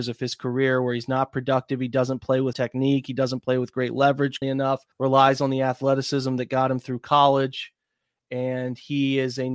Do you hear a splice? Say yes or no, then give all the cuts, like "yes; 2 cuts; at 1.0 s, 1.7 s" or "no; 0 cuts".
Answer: yes; 3 cuts; at 2.5 s, 4.4 s, 4.9 s